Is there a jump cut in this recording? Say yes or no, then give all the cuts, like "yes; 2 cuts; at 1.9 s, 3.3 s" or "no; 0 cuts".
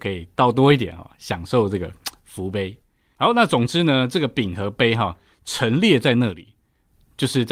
no; 0 cuts